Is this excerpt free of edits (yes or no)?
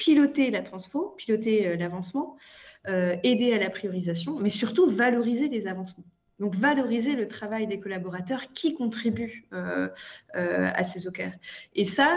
yes